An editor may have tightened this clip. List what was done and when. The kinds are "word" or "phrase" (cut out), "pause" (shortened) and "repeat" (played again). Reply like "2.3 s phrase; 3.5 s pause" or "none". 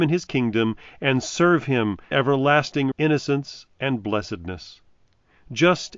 2.1 s word; 2.9 s word